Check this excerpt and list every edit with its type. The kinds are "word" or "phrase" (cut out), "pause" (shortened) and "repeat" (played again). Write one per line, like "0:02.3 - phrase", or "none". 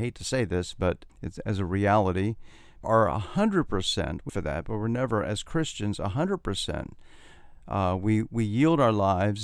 0:01.1 - word
0:02.8 - phrase
0:04.3 - phrase